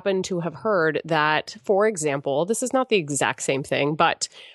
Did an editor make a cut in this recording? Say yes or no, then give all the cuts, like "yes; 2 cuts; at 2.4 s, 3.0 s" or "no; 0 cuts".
no; 0 cuts